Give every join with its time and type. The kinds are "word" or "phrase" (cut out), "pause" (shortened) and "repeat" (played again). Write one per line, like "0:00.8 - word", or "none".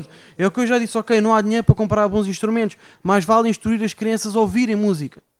none